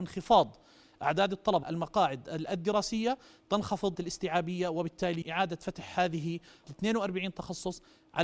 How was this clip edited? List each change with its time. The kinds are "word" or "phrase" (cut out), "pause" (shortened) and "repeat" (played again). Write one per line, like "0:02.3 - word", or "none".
0:01.6 - word
0:03.9 - word
0:05.2 - word
0:06.6 - word

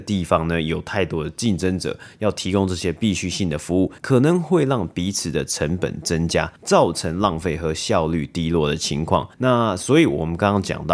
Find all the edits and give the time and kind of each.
0:04.0 - pause
0:06.6 - pause
0:09.3 - pause

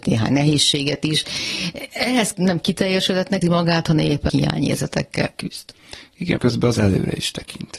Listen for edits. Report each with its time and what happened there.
0:02.3 - word
0:03.4 - word
0:04.3 - word
0:06.4 - word
0:06.8 - word

